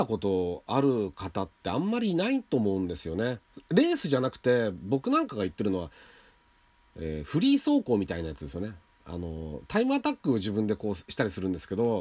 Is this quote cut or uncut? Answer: uncut